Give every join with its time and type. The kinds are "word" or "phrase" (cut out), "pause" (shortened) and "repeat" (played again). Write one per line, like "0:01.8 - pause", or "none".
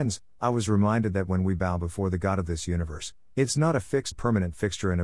0:04.1 - word